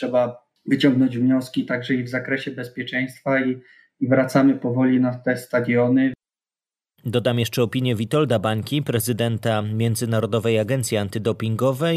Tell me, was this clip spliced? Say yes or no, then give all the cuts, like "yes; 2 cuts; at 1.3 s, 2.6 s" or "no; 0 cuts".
no; 0 cuts